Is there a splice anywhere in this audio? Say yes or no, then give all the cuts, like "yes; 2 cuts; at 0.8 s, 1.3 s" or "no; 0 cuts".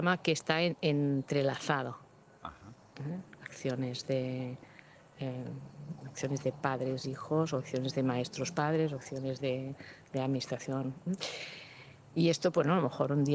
no; 0 cuts